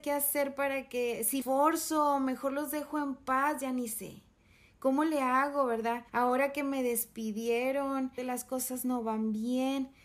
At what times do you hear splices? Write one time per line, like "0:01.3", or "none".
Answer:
0:01.4
0:06.1
0:08.2